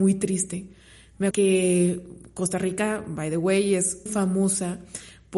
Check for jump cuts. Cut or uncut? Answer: cut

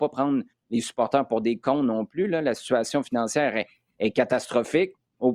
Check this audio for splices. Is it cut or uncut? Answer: uncut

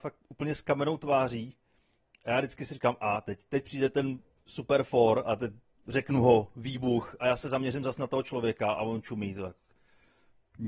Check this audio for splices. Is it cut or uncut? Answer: uncut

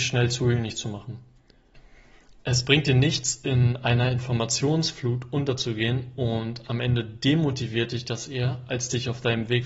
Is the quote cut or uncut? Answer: uncut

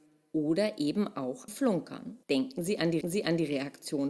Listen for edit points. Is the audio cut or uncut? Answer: cut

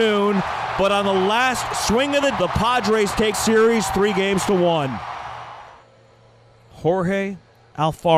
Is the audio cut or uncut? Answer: cut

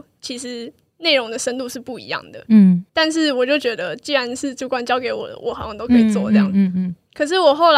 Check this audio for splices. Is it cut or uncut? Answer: cut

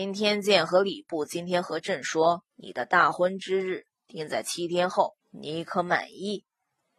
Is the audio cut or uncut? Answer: cut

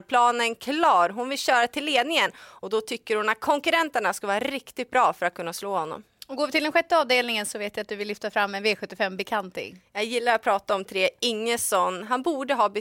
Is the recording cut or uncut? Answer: uncut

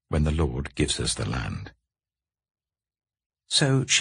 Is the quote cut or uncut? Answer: uncut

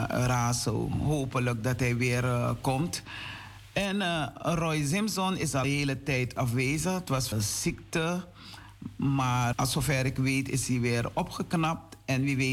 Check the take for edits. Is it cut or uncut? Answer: cut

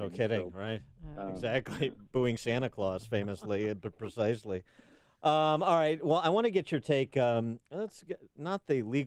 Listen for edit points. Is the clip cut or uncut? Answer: uncut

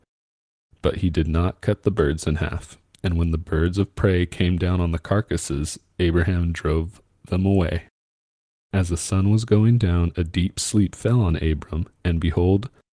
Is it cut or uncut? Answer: uncut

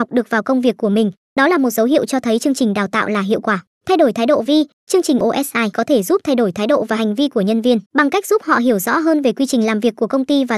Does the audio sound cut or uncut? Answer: cut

